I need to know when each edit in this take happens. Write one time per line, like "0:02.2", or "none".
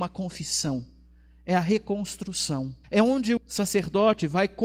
0:02.8
0:03.4